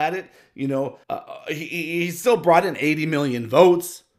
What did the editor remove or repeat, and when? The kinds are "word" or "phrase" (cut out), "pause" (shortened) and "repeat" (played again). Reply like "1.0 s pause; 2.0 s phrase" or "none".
1.0 s pause